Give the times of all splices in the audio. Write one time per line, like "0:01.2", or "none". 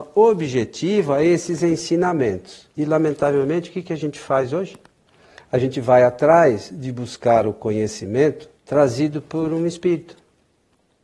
0:02.7
0:05.0
0:08.6